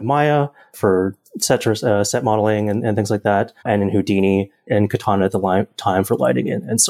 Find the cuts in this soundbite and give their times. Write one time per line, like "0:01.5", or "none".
0:03.6